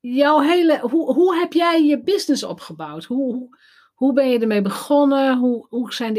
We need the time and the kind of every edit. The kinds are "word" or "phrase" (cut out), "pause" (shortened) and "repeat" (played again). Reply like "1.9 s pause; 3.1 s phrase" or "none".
none